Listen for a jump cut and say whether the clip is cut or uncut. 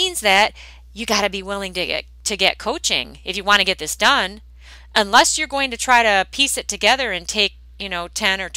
uncut